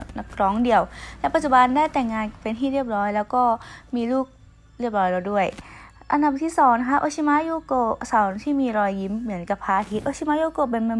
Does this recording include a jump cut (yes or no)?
no